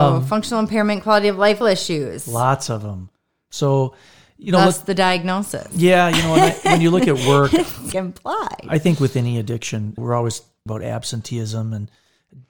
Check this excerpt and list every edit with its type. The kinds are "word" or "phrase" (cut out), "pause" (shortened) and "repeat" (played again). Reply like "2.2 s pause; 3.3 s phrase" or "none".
1.6 s word; 7.9 s word; 10.0 s word; 10.7 s word